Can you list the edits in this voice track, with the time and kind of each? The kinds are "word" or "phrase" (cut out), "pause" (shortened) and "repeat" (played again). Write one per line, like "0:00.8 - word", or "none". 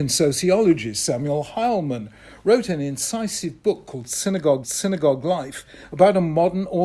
0:04.6 - repeat